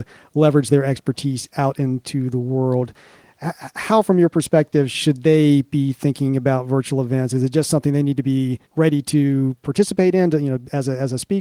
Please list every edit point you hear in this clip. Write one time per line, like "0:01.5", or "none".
0:08.7